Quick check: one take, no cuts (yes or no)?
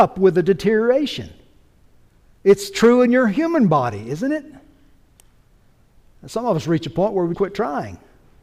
no